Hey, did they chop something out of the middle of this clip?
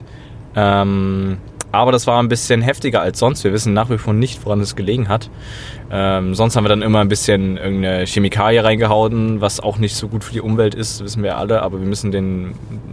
no; 0 cuts

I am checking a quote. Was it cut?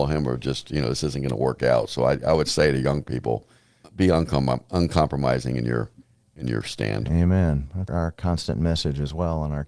yes; 2 cuts; at 3.8 s, 7.9 s

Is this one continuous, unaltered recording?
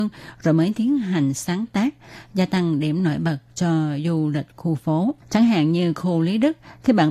no; 1 cut; at 5.2 s

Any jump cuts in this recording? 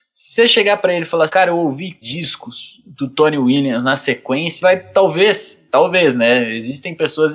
yes; 3 cuts; at 1.3 s, 2.0 s, 4.6 s

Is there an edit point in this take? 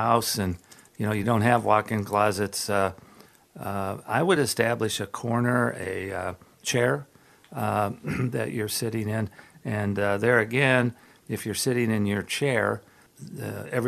no; 0 cuts

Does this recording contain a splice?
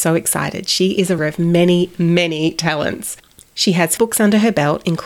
yes; 2 cuts; at 1.2 s, 4.0 s

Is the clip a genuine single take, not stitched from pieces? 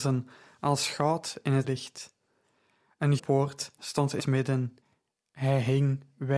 no; 3 cuts; at 1.6 s, 3.2 s, 4.2 s

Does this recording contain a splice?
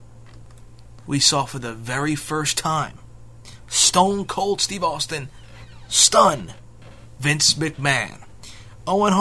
no; 0 cuts

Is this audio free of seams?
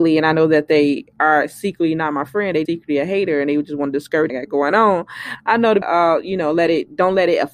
no; 3 cuts; at 2.7 s, 4.3 s, 5.8 s

